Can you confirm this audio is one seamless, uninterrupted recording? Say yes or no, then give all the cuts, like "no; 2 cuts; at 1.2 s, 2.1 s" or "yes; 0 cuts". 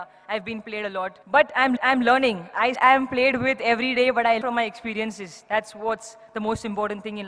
no; 4 cuts; at 1.2 s, 1.8 s, 2.7 s, 4.4 s